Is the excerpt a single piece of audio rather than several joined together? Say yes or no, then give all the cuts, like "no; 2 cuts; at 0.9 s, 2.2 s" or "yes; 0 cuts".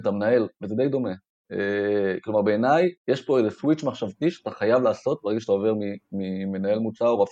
no; 1 cut; at 3.0 s